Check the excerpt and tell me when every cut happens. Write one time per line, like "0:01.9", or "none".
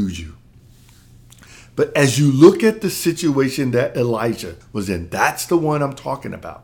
0:04.6